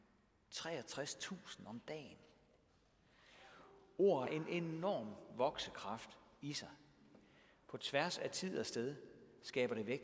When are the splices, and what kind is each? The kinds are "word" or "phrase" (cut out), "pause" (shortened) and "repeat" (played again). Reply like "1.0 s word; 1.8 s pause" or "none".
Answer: 4.3 s word